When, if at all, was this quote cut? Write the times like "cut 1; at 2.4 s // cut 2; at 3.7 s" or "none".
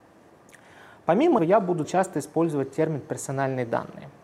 cut 1; at 1.4 s // cut 2; at 1.8 s